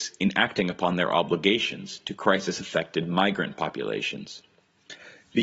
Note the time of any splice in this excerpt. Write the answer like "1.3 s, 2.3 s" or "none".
none